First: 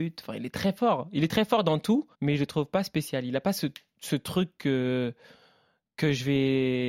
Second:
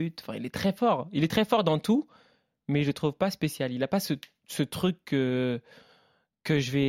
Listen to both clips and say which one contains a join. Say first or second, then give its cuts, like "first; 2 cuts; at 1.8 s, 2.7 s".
first; 1 cut; at 2.1 s